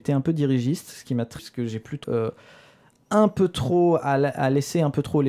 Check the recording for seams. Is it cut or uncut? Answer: cut